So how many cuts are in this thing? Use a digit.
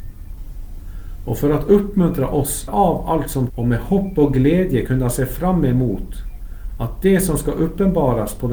2